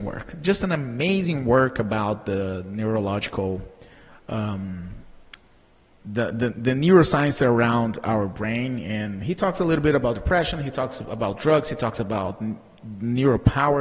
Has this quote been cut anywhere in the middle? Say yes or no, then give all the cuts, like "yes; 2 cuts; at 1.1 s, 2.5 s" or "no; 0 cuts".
yes; 1 cut; at 6.5 s